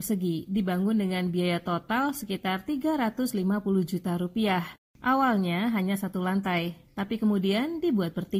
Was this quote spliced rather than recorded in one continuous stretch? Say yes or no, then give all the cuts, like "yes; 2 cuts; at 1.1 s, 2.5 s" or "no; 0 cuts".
no; 0 cuts